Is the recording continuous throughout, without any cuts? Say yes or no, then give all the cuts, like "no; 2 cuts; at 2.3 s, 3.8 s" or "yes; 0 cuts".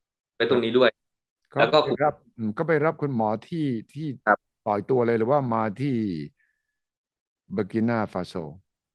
yes; 0 cuts